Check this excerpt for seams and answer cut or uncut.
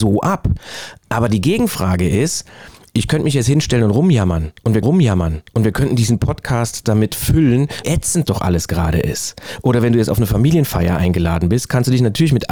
cut